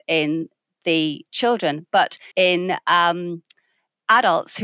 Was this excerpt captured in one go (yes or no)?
no